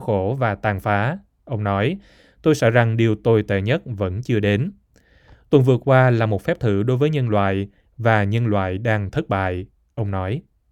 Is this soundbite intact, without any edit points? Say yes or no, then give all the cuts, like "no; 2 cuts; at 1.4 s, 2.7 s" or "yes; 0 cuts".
yes; 0 cuts